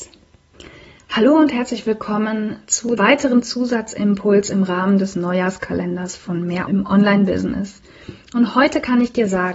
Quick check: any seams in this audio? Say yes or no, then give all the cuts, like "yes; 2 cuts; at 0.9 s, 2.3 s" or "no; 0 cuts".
yes; 2 cuts; at 3.0 s, 6.7 s